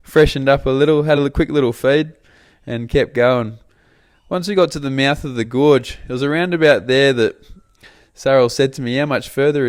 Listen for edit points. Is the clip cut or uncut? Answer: uncut